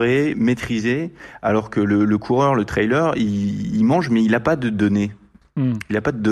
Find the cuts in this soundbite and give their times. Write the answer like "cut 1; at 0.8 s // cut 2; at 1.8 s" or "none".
none